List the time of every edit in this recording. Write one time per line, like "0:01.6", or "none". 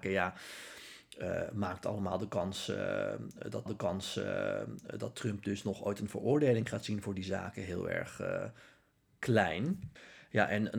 0:03.7